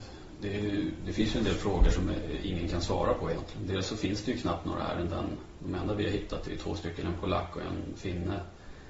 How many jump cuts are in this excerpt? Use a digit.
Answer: 0